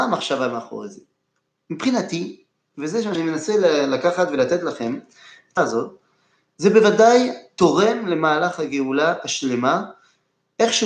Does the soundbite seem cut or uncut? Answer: cut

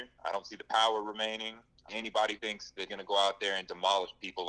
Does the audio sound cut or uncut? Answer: cut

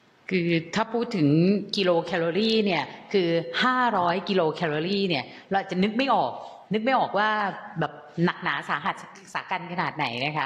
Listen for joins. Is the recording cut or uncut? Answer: uncut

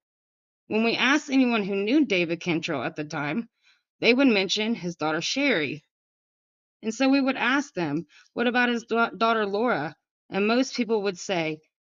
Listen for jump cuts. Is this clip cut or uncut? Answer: uncut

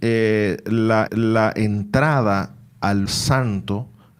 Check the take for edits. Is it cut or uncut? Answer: cut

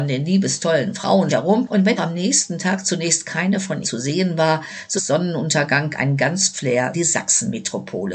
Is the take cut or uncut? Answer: cut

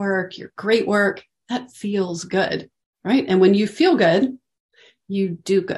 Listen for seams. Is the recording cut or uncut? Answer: uncut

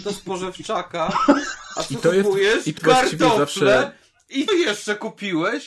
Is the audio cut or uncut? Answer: cut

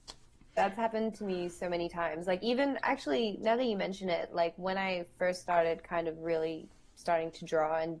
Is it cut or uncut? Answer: uncut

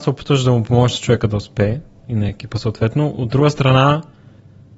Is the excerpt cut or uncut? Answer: uncut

